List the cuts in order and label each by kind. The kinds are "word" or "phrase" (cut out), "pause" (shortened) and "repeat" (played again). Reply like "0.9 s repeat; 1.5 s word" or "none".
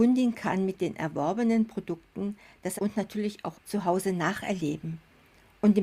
2.8 s word; 3.5 s word